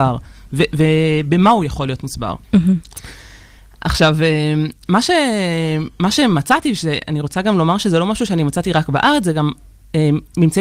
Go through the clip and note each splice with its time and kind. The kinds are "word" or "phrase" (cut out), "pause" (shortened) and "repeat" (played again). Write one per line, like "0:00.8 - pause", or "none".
0:02.4 - pause